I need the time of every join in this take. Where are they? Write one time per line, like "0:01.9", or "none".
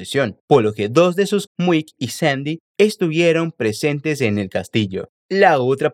0:01.5

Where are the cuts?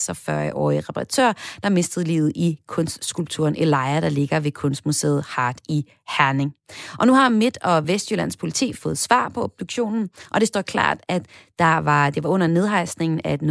none

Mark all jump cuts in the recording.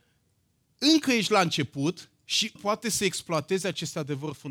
0:02.6

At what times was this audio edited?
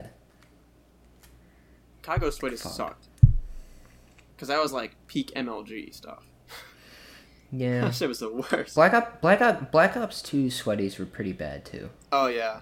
none

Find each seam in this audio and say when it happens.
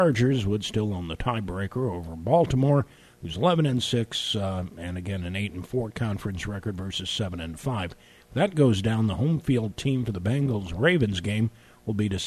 none

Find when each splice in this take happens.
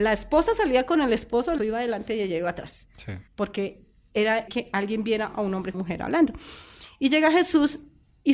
0:01.6
0:03.3
0:04.5
0:05.7

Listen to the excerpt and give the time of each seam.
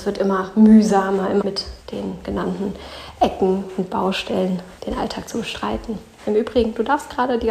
0:01.4
0:01.8
0:04.8

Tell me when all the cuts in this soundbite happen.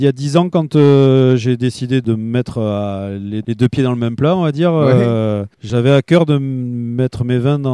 0:05.5

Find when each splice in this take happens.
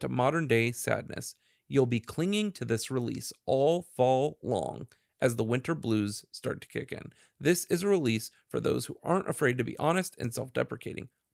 none

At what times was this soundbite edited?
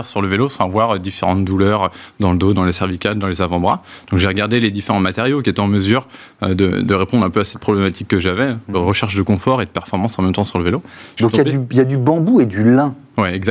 none

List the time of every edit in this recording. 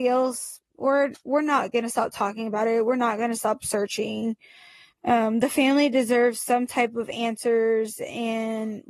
none

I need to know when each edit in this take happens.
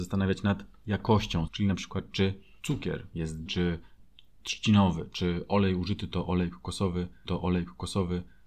0:01.5
0:02.6
0:03.5
0:07.2

